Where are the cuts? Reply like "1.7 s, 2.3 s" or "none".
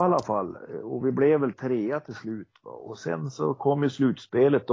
none